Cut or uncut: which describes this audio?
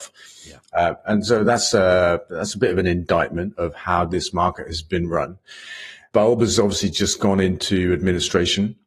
uncut